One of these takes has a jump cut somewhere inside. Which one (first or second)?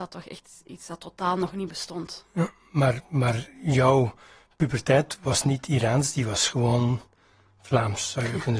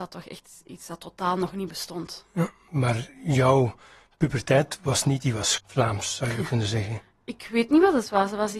second